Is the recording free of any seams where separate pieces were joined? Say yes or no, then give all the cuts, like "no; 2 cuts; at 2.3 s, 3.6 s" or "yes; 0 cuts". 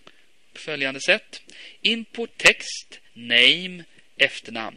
no; 2 cuts; at 2.3 s, 3.1 s